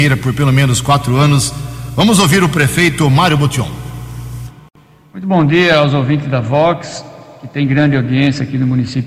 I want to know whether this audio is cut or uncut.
uncut